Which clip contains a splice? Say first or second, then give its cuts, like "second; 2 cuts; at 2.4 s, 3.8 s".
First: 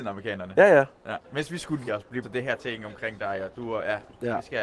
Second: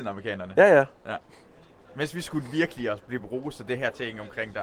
first; 3 cuts; at 1.2 s, 1.9 s, 2.2 s